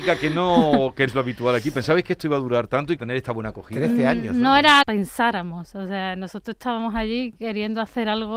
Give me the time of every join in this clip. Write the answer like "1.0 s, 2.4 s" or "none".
1.1 s, 3.0 s, 4.8 s